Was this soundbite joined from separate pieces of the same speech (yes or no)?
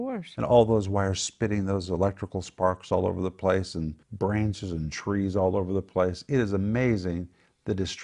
yes